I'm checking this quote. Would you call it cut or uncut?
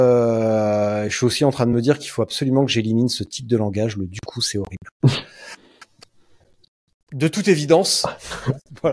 uncut